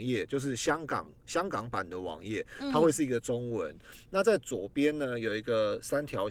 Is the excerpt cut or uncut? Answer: cut